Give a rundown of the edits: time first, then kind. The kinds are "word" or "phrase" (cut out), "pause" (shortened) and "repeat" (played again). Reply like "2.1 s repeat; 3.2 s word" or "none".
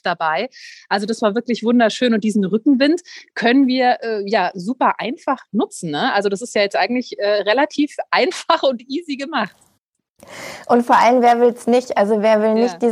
none